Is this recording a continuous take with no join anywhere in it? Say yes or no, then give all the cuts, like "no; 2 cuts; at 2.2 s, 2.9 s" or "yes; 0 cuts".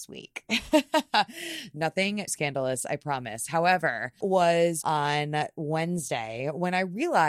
no; 3 cuts; at 2.3 s, 4.2 s, 4.8 s